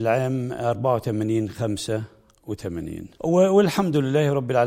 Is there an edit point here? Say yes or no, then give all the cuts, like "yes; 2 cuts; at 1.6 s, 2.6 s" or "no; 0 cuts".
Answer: yes; 1 cut; at 3.1 s